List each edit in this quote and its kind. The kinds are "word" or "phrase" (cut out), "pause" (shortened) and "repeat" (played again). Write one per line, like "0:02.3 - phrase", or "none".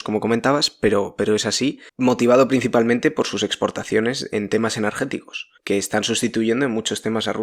0:01.9 - pause
0:05.6 - pause